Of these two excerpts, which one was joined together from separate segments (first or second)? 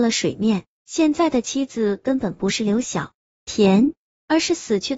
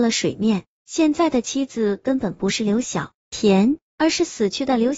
second